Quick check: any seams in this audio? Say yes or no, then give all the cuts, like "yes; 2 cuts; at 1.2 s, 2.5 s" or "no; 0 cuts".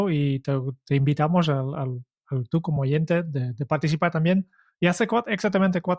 no; 0 cuts